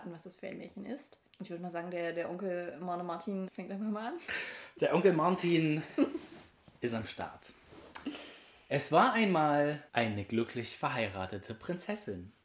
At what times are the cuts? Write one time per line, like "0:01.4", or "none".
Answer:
0:01.3
0:03.5
0:09.9